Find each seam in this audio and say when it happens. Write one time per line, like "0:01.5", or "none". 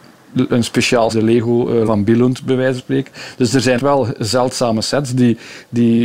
0:01.1
0:01.9
0:02.8
0:03.8